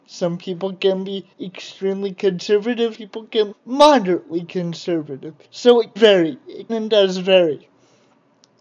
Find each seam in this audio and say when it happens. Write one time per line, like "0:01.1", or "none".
0:01.3
0:02.9
0:03.5
0:05.4
0:06.0
0:06.7